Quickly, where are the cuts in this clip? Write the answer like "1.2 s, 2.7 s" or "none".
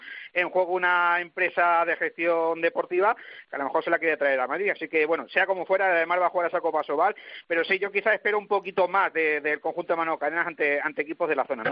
none